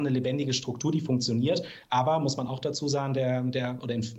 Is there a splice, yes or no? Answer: no